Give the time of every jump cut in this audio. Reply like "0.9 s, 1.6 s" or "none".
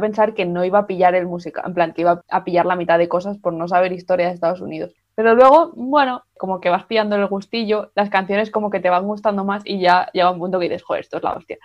none